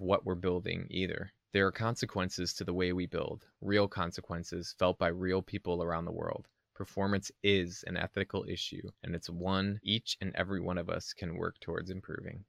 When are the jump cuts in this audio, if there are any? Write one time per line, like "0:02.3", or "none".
0:08.9